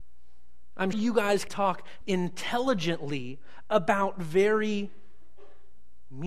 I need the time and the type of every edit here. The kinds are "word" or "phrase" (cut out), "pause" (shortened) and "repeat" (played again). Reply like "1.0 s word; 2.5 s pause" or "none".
0.9 s word; 1.5 s word; 2.0 s word